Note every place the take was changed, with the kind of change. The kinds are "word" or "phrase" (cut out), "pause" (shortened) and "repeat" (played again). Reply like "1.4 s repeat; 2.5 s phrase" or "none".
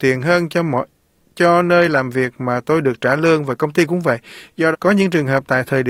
4.7 s word